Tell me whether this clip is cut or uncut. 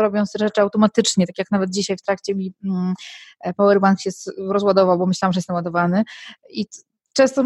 uncut